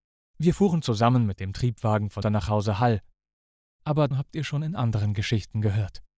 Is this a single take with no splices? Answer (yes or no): no